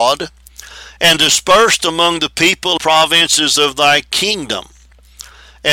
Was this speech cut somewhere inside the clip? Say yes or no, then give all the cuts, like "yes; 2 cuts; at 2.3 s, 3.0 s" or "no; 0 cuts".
yes; 1 cut; at 2.8 s